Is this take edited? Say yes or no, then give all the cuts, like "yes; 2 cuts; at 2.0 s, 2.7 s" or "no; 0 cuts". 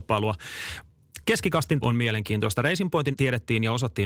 yes; 2 cuts; at 1.8 s, 3.1 s